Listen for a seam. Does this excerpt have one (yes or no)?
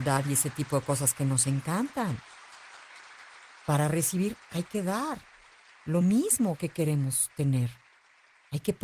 no